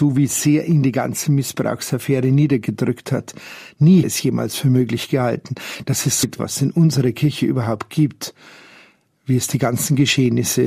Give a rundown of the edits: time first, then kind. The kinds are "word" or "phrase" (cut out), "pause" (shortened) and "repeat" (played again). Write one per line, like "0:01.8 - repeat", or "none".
0:04.0 - phrase
0:06.2 - word